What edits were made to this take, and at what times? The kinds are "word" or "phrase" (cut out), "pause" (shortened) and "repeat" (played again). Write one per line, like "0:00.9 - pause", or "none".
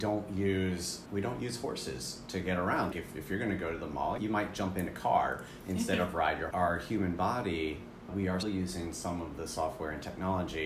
0:01.1 - word
0:02.9 - word
0:04.2 - word
0:06.5 - phrase
0:08.1 - word
0:08.4 - word